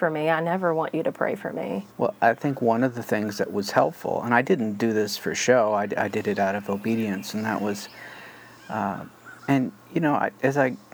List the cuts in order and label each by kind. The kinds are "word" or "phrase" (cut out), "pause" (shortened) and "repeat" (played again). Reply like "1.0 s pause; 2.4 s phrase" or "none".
1.9 s pause; 9.4 s pause